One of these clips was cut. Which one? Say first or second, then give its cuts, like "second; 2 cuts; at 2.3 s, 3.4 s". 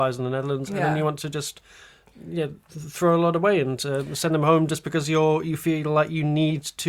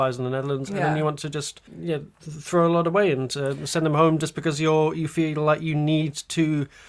second; 1 cut; at 1.7 s